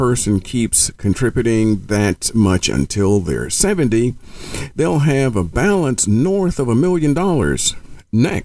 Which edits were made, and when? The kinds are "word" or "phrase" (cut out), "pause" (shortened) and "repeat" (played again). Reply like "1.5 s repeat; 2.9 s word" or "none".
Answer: none